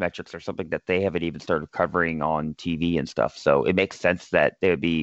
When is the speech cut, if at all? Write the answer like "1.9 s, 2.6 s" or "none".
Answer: none